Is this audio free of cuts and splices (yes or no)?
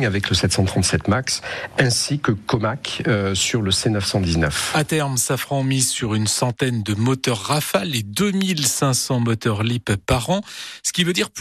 yes